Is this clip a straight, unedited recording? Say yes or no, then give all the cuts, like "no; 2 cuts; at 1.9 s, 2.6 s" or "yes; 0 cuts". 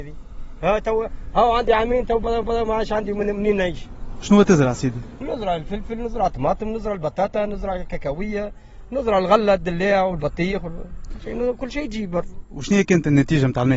no; 1 cut; at 2.4 s